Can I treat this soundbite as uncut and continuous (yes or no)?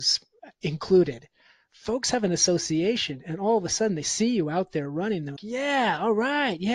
no